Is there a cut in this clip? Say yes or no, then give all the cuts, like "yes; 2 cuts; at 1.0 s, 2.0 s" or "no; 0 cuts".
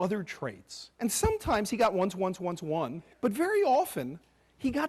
yes; 2 cuts; at 0.9 s, 3.1 s